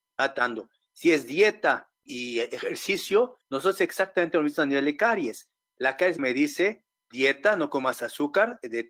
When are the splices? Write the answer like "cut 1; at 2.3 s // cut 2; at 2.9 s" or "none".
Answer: cut 1; at 2.1 s // cut 2; at 3.4 s // cut 3; at 6.2 s

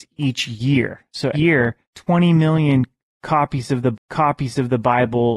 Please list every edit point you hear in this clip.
cut 1; at 1.3 s // cut 2; at 1.8 s // cut 3; at 3.9 s

